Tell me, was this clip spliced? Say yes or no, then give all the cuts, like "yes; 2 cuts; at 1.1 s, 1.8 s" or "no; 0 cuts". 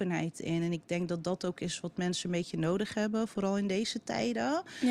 no; 0 cuts